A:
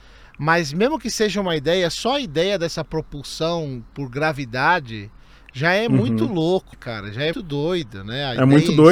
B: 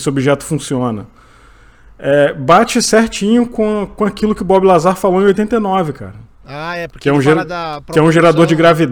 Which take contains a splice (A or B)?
A